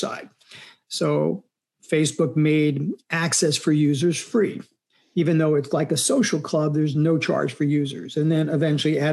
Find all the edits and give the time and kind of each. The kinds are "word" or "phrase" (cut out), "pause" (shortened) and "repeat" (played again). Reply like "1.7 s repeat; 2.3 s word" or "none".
none